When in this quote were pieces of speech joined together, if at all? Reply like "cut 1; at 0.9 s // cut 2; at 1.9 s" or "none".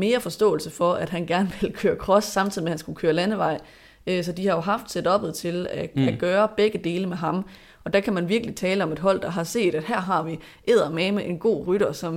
none